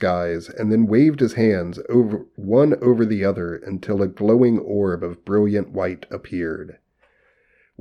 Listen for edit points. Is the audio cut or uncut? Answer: uncut